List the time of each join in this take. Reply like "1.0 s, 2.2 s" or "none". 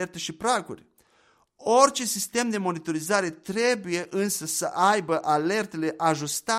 none